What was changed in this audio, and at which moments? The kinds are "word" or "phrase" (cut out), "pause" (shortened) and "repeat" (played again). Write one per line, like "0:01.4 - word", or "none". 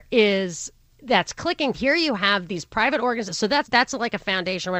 0:01.7 - phrase
0:03.6 - word